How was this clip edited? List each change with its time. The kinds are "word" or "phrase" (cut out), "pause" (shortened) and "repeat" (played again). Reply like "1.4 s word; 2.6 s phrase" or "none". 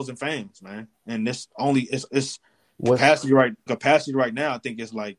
2.1 s word; 3.7 s word